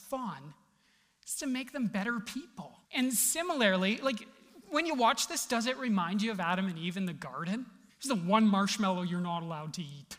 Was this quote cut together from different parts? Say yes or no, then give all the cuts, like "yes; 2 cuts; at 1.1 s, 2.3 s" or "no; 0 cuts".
yes; 2 cuts; at 2.8 s, 7.9 s